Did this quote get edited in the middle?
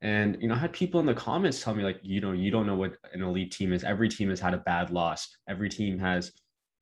no; 0 cuts

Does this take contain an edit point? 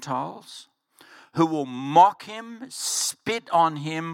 no; 0 cuts

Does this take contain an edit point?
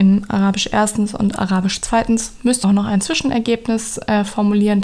yes; 1 cut; at 2.6 s

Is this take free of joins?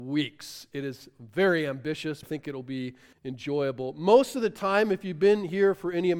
no; 2 cuts; at 2.2 s, 3.1 s

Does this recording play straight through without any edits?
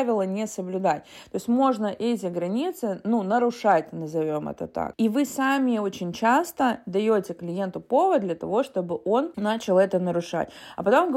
yes; 0 cuts

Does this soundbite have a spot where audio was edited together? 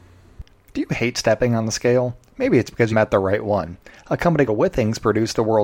yes; 2 cuts; at 2.9 s, 4.5 s

